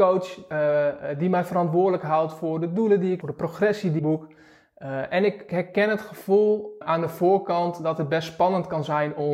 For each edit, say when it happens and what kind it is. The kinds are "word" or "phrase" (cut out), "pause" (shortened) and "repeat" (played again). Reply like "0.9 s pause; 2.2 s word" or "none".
3.2 s phrase; 4.0 s word; 5.5 s phrase; 6.8 s word